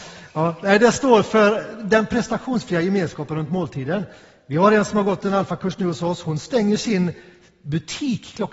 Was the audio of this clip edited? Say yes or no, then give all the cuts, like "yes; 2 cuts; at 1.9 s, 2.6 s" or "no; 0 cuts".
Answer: no; 0 cuts